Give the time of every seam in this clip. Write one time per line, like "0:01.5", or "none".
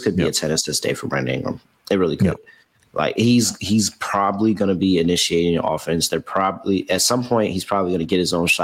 none